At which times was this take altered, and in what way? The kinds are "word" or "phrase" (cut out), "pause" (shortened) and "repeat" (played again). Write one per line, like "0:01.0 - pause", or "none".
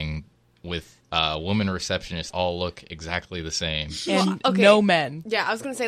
0:01.0 - pause
0:02.3 - word